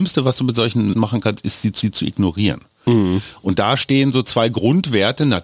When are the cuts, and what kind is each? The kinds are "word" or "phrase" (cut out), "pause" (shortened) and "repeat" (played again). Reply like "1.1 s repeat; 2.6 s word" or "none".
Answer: 0.9 s word; 1.8 s repeat